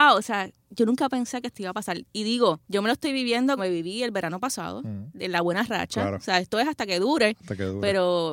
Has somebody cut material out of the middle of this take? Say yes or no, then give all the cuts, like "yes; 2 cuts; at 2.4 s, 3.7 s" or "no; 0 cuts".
yes; 2 cuts; at 2.6 s, 3.6 s